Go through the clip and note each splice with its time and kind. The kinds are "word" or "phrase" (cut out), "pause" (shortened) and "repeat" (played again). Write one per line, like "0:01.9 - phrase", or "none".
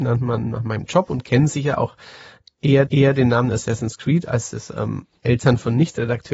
0:02.9 - repeat